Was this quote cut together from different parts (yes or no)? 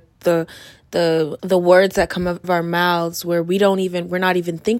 yes